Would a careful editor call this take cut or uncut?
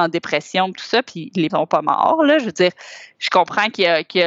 cut